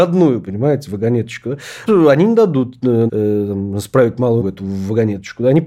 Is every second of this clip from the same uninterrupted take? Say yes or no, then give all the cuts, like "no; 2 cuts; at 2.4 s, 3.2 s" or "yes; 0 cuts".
no; 3 cuts; at 1.9 s, 3.1 s, 4.4 s